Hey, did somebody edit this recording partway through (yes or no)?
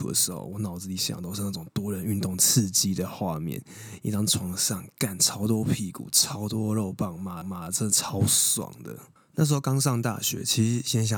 yes